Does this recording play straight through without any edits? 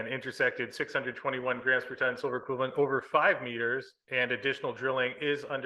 yes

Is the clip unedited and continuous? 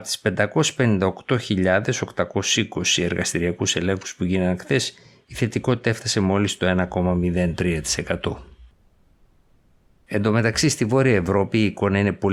yes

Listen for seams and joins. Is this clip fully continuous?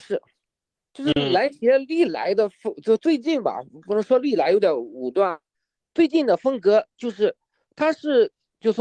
yes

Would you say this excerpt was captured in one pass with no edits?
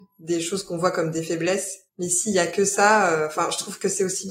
no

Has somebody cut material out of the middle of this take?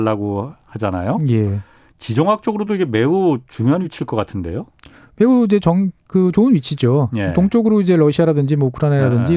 no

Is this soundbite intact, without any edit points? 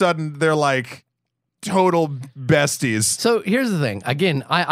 yes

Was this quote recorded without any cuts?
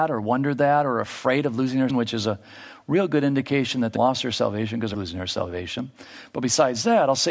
no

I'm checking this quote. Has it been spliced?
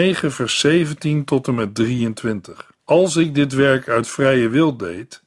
yes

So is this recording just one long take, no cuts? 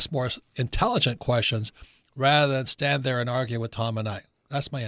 yes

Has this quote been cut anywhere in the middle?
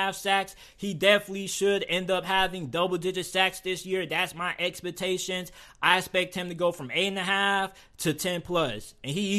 no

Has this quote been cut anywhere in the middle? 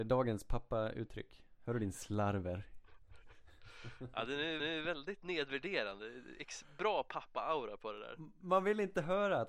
yes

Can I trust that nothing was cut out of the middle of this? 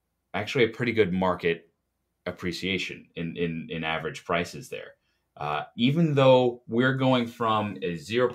yes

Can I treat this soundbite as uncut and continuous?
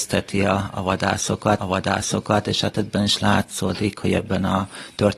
no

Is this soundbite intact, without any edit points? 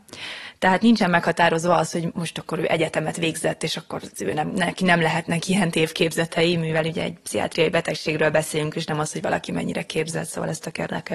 yes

